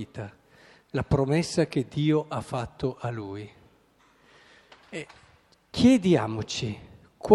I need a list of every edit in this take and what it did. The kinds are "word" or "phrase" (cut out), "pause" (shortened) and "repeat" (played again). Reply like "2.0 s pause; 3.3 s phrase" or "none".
none